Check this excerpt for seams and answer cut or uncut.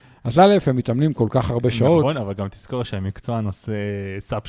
uncut